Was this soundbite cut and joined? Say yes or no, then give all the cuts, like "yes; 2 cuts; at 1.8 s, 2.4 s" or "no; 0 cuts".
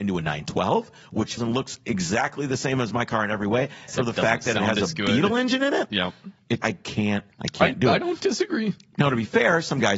yes; 4 cuts; at 1.4 s, 3.9 s, 6.6 s, 7.3 s